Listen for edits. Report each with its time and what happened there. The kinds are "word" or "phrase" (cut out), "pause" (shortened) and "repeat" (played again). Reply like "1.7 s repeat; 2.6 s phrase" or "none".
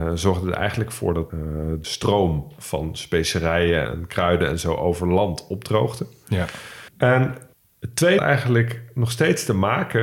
1.3 s word; 1.8 s phrase; 3.9 s word; 6.9 s pause; 8.2 s word